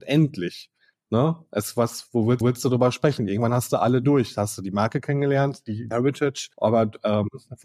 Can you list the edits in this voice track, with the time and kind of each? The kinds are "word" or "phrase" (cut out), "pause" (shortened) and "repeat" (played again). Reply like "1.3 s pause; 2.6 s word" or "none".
0.9 s pause; 2.4 s repeat; 4.0 s word; 5.9 s word; 6.5 s pause